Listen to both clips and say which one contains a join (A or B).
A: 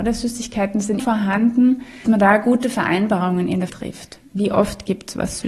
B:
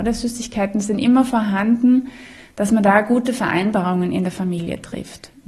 A